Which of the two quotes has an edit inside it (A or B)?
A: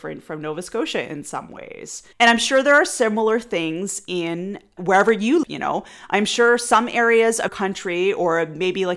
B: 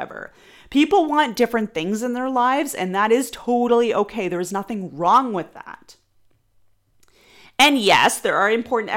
A